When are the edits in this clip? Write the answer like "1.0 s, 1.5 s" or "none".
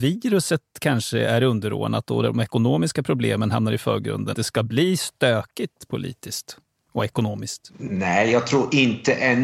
4.3 s